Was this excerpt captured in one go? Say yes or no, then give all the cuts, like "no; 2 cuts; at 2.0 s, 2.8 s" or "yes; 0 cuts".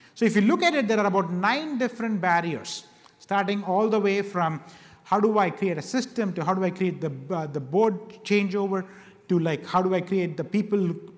yes; 0 cuts